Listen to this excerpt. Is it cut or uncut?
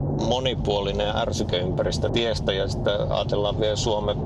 cut